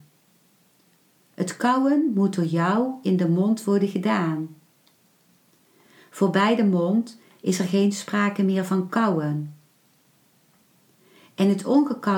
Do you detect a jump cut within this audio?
no; 0 cuts

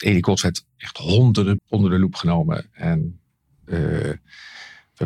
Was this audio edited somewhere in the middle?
yes; 1 cut; at 1.6 s

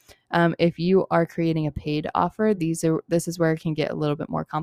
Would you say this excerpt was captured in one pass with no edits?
yes; 0 cuts

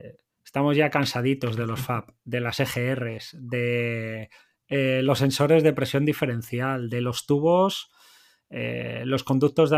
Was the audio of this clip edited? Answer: no; 0 cuts

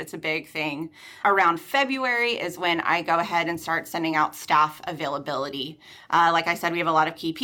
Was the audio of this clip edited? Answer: no; 0 cuts

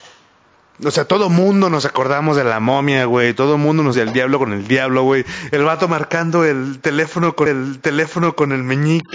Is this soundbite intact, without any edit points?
no; 2 cuts; at 3.9 s, 7.5 s

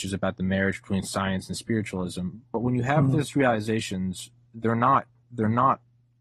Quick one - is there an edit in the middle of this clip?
no; 0 cuts

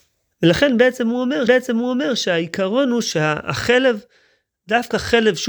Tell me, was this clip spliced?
yes; 1 cut; at 1.5 s

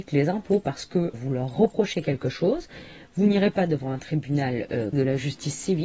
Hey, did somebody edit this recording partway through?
yes; 2 cuts; at 1.1 s, 4.9 s

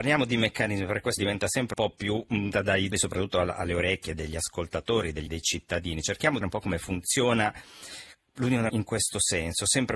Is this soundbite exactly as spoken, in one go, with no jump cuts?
no; 8 cuts; at 1.2 s, 1.7 s, 2.5 s, 2.9 s, 4.1 s, 5.3 s, 6.4 s, 8.7 s

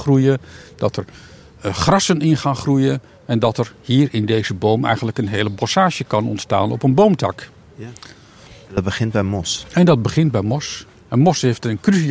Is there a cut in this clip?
no; 0 cuts

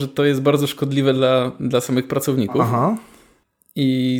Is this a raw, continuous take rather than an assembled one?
yes; 0 cuts

